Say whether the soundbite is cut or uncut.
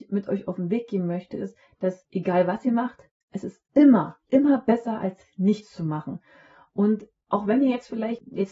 cut